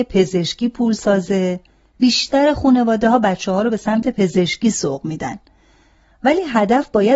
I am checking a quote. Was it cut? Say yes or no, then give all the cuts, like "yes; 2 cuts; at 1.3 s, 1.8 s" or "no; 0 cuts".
no; 0 cuts